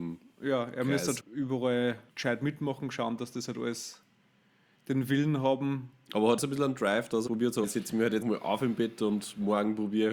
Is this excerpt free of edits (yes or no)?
no